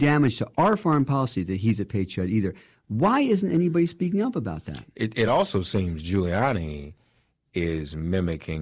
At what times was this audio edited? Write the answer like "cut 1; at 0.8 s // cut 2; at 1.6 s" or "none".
none